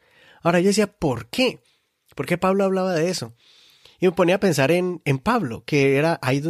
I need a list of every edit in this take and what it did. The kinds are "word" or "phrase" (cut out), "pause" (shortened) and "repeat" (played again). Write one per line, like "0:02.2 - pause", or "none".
none